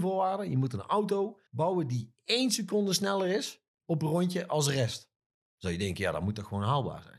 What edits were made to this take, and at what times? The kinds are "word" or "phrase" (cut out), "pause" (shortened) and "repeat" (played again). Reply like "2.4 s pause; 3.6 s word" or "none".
1.5 s pause